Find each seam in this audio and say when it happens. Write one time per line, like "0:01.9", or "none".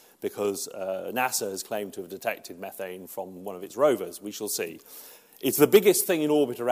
none